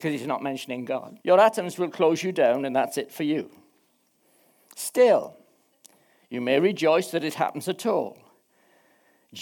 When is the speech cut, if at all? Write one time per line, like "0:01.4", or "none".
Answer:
0:01.2